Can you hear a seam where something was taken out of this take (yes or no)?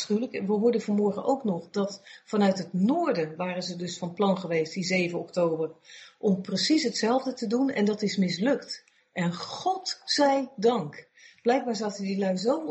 no